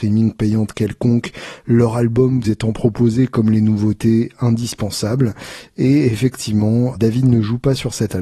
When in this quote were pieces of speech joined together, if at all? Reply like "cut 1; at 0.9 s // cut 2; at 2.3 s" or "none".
cut 1; at 2.4 s // cut 2; at 7.0 s